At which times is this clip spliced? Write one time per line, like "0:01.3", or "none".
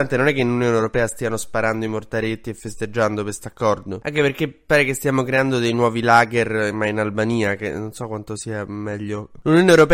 none